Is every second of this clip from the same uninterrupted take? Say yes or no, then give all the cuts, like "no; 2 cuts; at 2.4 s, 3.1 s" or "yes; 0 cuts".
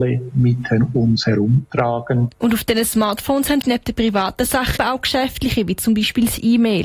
no; 3 cuts; at 2.3 s, 3.6 s, 4.8 s